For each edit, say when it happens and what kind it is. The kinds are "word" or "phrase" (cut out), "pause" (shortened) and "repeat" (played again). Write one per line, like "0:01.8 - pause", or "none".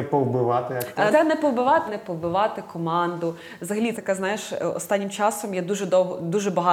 0:01.1 - word
0:01.9 - word
0:03.9 - word